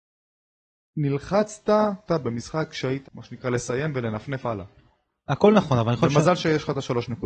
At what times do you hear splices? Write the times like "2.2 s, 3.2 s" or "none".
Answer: 2.1 s, 3.0 s